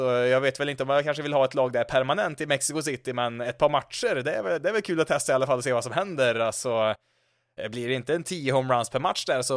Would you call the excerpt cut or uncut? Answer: uncut